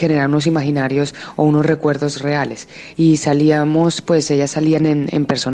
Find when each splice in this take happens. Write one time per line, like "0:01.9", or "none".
none